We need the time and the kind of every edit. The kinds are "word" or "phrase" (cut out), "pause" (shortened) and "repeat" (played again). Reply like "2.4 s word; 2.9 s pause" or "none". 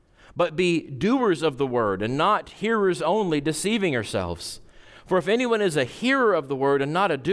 none